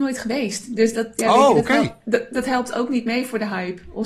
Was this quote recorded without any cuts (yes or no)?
yes